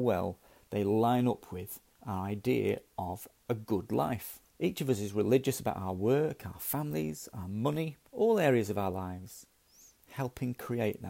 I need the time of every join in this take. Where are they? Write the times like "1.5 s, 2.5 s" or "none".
4.5 s, 8.1 s